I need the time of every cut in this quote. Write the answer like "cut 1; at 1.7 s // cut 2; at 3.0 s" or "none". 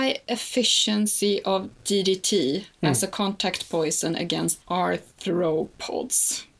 cut 1; at 4.6 s

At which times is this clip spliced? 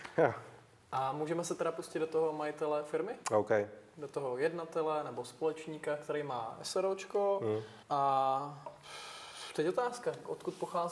cut 1; at 3.2 s // cut 2; at 7.8 s

